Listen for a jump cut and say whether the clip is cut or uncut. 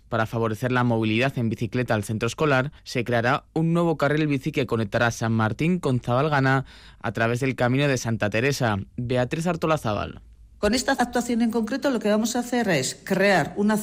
cut